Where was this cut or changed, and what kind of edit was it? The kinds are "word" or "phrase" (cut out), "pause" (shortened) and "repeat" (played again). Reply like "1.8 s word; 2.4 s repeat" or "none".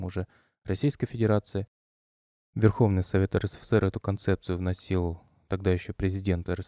none